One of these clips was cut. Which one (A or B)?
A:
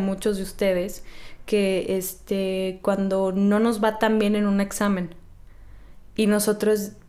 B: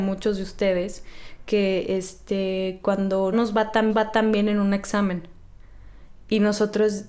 B